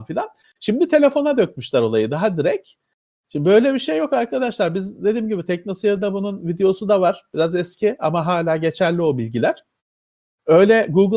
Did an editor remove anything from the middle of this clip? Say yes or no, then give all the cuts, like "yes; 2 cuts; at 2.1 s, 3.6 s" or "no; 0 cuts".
no; 0 cuts